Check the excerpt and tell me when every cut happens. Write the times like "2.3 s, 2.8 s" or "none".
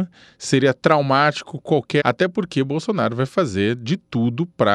2.0 s